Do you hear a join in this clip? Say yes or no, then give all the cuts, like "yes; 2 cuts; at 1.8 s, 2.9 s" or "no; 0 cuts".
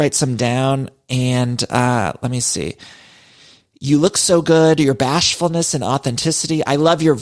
no; 0 cuts